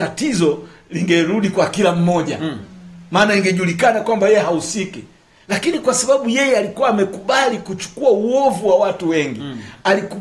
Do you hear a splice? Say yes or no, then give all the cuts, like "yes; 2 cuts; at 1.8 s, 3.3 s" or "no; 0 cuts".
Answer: no; 0 cuts